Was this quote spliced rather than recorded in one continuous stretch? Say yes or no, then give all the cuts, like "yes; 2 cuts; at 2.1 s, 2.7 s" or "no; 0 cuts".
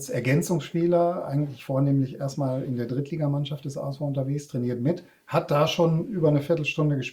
no; 0 cuts